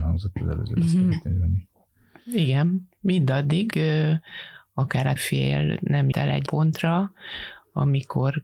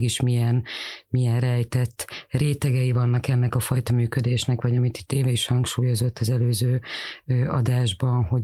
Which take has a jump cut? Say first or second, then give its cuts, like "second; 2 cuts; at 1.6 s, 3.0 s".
first; 4 cuts; at 3.7 s, 5.2 s, 6.1 s, 6.5 s